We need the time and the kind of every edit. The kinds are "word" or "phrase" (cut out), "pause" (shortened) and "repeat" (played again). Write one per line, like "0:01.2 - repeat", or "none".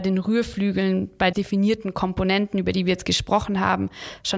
0:01.3 - phrase